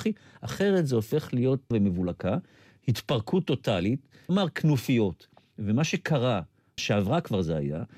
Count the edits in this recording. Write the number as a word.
three